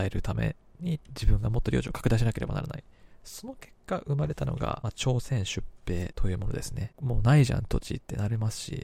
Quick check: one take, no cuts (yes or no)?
yes